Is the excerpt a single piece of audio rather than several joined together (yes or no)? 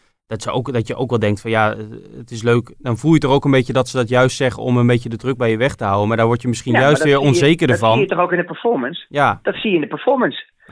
no